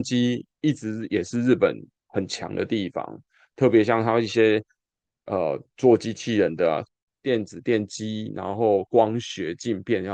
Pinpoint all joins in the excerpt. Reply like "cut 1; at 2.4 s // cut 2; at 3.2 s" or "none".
none